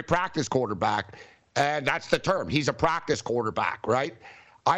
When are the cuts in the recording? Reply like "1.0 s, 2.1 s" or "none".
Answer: none

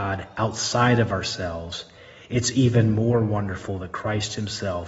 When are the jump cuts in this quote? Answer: none

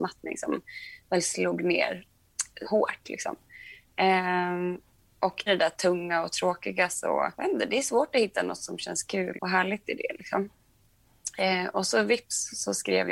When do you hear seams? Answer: 2.6 s, 5.5 s, 7.4 s, 9.4 s

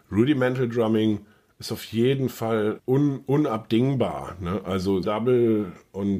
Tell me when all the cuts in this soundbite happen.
2.8 s, 5.0 s

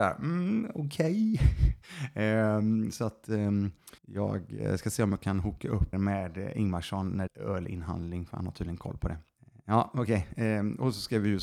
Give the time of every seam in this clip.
4.0 s, 5.9 s, 7.3 s, 9.4 s

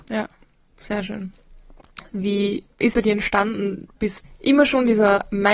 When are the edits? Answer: 2.9 s, 4.2 s

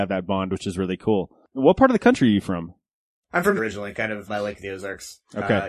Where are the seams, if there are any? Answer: 3.6 s, 4.3 s

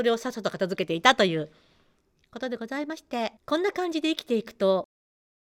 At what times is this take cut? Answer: 3.4 s

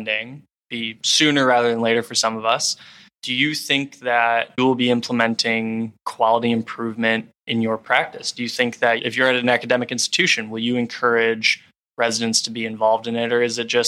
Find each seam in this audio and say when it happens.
4.6 s

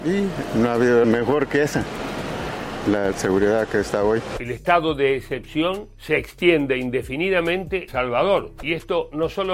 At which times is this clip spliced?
1.0 s, 3.1 s, 7.9 s

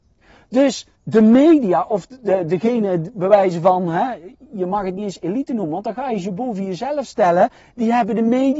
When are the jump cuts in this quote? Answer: 0.9 s

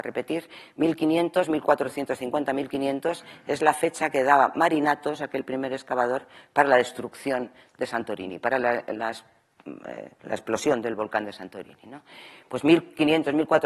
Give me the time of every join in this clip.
10.2 s

